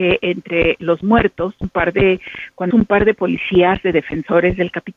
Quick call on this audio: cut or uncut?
cut